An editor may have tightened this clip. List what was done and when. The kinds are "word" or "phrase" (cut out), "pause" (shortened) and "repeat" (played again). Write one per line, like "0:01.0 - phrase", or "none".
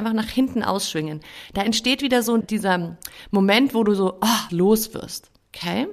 0:02.4 - word
0:04.5 - word